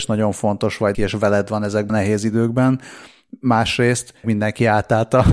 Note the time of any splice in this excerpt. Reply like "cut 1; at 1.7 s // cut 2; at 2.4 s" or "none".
cut 1; at 0.9 s // cut 2; at 1.9 s // cut 3; at 4.2 s